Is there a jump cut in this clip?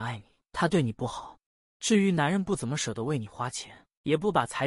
no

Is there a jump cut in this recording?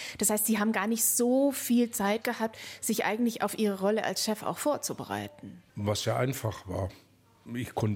yes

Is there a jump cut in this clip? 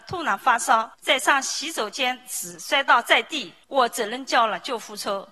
yes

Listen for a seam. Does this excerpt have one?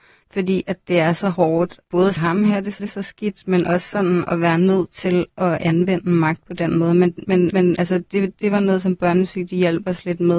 yes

